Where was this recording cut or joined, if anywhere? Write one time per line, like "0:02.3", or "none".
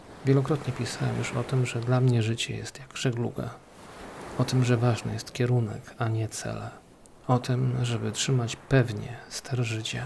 0:06.9